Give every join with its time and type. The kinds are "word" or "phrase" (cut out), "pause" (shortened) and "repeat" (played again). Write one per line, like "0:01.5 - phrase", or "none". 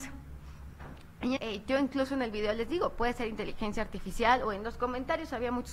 0:01.4 - word